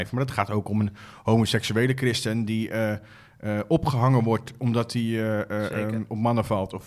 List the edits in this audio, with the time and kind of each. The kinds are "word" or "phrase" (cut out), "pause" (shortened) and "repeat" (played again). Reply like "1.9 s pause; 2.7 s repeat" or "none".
none